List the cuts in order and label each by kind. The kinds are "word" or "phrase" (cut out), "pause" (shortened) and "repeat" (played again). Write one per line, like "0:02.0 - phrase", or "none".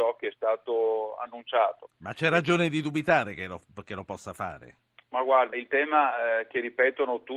0:05.5 - word